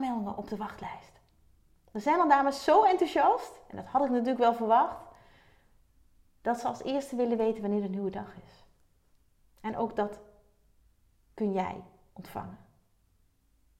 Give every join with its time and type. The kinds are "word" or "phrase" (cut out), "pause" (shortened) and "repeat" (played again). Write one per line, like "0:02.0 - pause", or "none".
none